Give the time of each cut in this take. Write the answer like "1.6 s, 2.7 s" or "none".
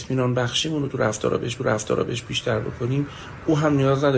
1.6 s

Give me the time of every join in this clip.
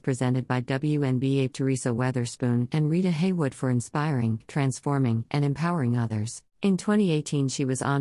1.5 s, 6.5 s

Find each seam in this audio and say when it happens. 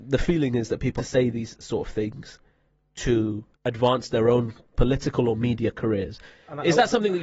1.0 s, 3.5 s

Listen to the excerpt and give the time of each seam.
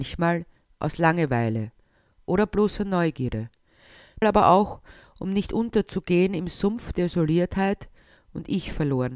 4.2 s

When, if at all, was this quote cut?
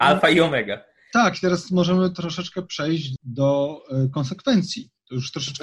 3.2 s

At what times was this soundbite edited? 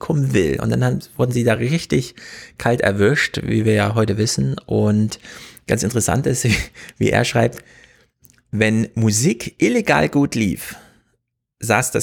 none

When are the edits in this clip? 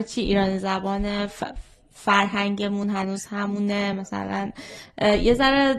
none

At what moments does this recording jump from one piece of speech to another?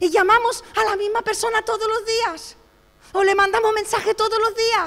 none

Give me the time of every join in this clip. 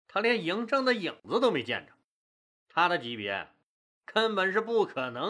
none

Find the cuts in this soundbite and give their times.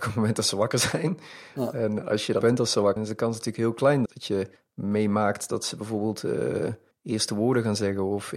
2.4 s, 3.0 s, 4.1 s, 4.6 s, 6.9 s

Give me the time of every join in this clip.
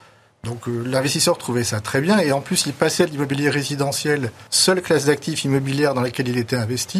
4.5 s

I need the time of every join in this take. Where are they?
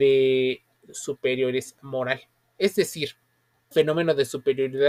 3.7 s

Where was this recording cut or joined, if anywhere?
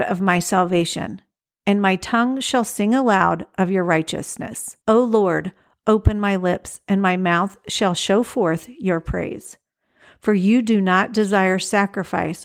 4.8 s

